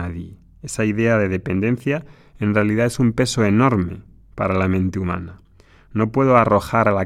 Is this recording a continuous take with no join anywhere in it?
yes; 0 cuts

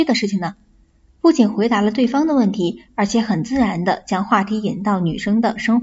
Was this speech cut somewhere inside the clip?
no; 0 cuts

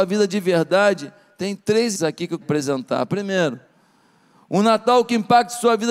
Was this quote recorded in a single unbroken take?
no; 2 cuts; at 1.9 s, 2.4 s

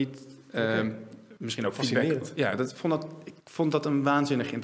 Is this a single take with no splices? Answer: no; 2 cuts; at 1.4 s, 3.4 s

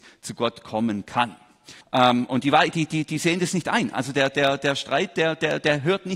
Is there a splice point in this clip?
yes; 1 cut; at 1.8 s

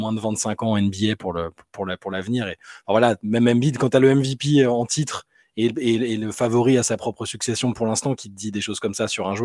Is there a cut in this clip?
no; 0 cuts

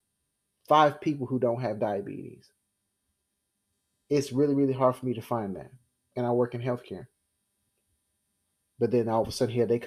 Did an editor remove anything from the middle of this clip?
no; 0 cuts

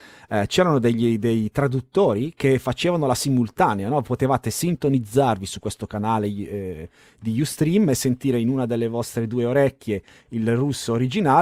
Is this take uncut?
yes; 0 cuts

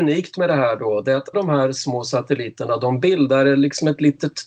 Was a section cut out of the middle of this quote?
yes; 1 cut; at 1.3 s

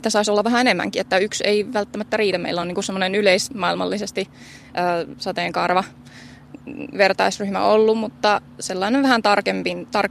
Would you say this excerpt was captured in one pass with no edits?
yes; 0 cuts

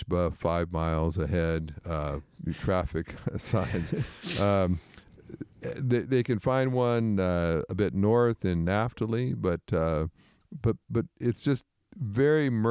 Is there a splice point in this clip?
no; 0 cuts

